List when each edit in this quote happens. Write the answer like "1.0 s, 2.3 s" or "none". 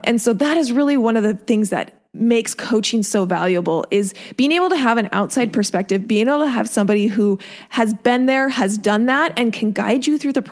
2.1 s